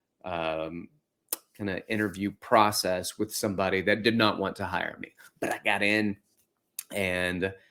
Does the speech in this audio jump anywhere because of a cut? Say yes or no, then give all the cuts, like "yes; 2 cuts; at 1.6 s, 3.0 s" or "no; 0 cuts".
no; 0 cuts